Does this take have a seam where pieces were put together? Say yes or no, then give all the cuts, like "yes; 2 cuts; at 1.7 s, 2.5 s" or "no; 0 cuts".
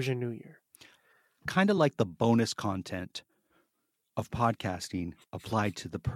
no; 0 cuts